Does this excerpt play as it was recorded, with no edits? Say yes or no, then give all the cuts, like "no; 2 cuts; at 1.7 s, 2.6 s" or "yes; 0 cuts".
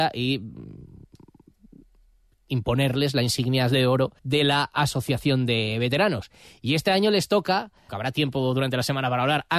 no; 2 cuts; at 4.2 s, 7.9 s